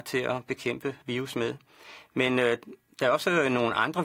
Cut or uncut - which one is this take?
cut